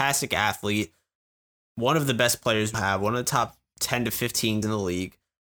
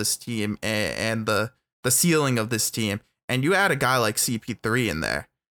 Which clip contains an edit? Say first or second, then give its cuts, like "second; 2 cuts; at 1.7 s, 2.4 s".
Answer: first; 2 cuts; at 2.7 s, 4.6 s